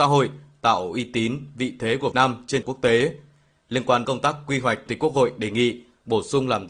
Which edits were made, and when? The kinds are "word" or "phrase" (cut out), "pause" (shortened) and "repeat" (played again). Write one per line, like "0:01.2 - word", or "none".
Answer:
0:02.1 - word
0:02.6 - word
0:04.0 - word
0:04.9 - word